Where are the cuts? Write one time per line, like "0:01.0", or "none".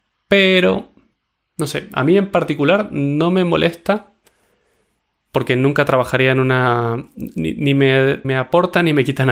0:08.2